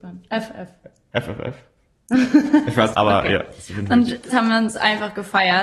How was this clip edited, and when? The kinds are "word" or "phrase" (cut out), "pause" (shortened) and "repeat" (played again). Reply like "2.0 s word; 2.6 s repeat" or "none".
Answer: 2.9 s phrase; 4.3 s word